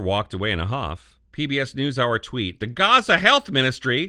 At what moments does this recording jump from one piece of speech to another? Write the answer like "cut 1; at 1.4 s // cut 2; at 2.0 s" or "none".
cut 1; at 1.2 s